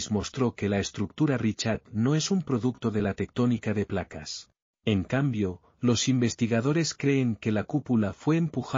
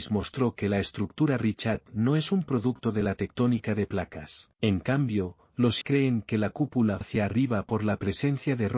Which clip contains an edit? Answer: second; 3 cuts; at 4.5 s, 5.8 s, 7.0 s

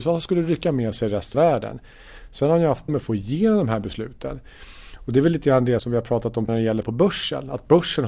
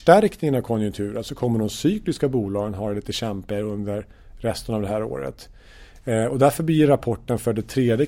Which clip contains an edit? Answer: first; 5 cuts; at 1.3 s, 2.9 s, 5.8 s, 6.5 s, 6.8 s

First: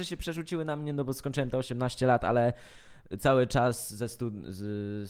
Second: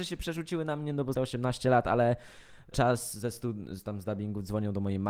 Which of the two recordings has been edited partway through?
second; 3 cuts; at 1.1 s, 2.7 s, 3.8 s

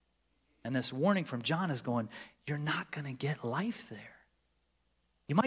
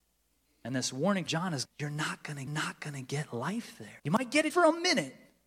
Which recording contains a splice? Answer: second; 5 cuts; at 1.3 s, 1.6 s, 2.5 s, 4.0 s, 4.5 s

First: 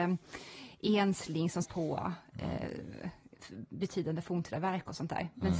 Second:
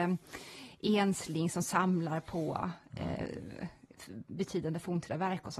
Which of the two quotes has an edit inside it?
first; 1 cut; at 1.6 s

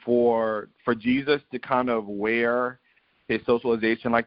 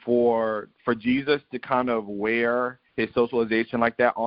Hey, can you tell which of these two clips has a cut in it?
second; 1 cut; at 2.9 s

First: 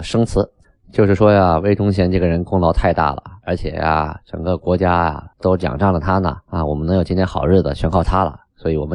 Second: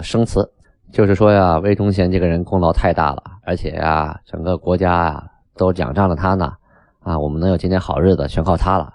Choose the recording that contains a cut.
first; 2 cuts; at 5.3 s, 6.4 s

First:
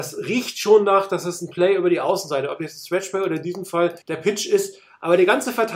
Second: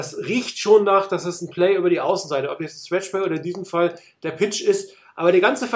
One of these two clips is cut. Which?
first; 1 cut; at 4.0 s

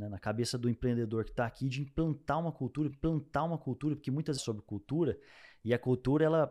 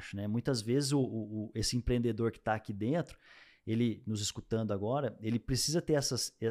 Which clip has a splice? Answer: first; 2 cuts; at 2.9 s, 4.4 s

